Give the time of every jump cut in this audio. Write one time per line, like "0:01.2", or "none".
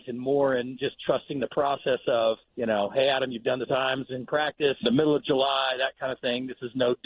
0:02.4
0:03.7
0:04.8